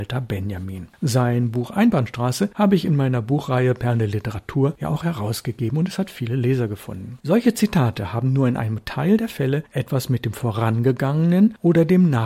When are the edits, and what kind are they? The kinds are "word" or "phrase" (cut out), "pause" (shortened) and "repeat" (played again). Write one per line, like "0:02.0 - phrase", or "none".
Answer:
0:07.2 - pause

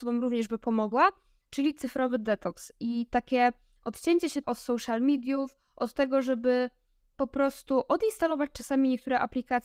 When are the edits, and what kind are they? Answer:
0:04.4 - word

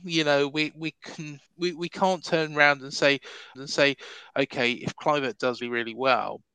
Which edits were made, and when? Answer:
0:01.5 - pause
0:03.5 - repeat
0:05.6 - word

